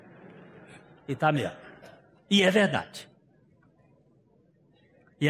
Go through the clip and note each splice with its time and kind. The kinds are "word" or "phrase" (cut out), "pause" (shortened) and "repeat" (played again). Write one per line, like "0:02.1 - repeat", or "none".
none